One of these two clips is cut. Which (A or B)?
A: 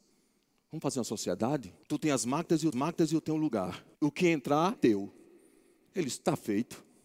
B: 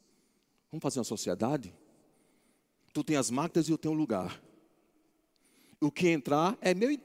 A